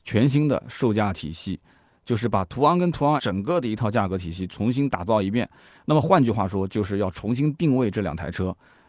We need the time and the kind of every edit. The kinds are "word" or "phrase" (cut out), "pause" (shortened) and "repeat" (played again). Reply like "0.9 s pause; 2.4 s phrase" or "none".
3.2 s word